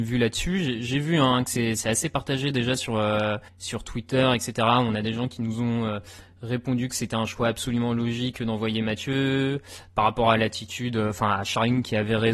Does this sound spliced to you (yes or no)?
yes